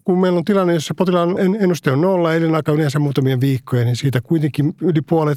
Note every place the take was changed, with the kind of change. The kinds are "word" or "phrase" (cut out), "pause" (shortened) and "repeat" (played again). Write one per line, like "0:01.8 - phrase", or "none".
0:01.4 - word